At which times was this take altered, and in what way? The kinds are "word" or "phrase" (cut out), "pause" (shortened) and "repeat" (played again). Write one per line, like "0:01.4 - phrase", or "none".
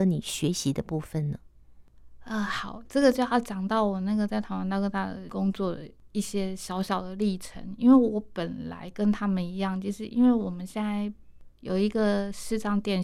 none